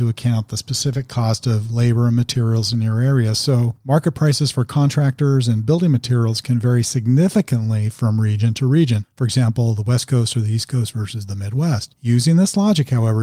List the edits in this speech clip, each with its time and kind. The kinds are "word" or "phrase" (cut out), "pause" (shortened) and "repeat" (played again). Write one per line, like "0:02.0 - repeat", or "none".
none